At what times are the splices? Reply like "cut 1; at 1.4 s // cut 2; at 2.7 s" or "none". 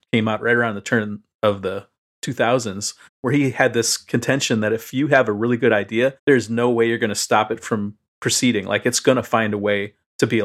cut 1; at 3.1 s // cut 2; at 6.2 s // cut 3; at 8.1 s